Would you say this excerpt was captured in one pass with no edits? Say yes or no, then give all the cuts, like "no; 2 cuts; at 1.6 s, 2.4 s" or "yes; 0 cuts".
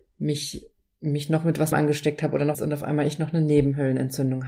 no; 2 cuts; at 1.7 s, 2.5 s